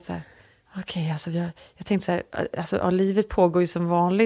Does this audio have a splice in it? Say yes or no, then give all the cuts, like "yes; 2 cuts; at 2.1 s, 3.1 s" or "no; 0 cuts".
no; 0 cuts